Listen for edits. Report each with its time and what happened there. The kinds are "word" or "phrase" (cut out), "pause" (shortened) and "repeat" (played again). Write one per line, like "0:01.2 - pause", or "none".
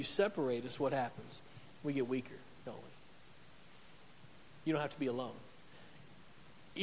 none